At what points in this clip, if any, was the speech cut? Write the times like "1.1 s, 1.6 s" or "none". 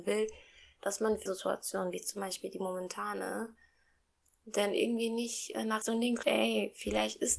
1.3 s, 5.8 s, 6.2 s